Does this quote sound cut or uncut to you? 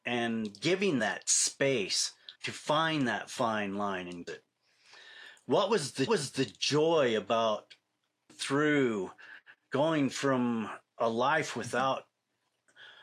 cut